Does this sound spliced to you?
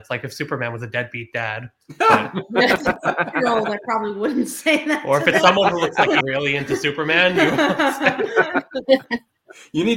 yes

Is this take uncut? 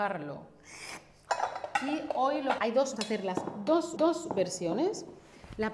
no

